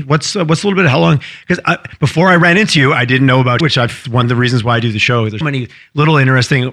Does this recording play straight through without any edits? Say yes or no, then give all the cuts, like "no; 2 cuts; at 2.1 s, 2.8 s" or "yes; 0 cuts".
no; 3 cuts; at 3.6 s, 4.0 s, 5.4 s